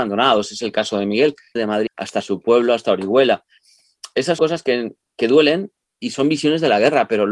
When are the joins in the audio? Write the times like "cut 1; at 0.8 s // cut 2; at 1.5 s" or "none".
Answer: cut 1; at 1.6 s // cut 2; at 1.9 s // cut 3; at 4.4 s